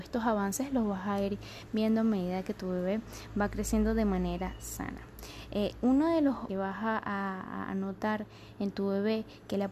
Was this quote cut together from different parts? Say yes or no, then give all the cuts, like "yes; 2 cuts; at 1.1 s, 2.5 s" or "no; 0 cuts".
yes; 1 cut; at 6.5 s